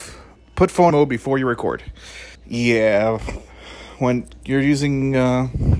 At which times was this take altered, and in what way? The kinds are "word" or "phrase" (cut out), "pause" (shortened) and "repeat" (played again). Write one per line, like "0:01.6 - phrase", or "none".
0:00.9 - phrase
0:02.3 - pause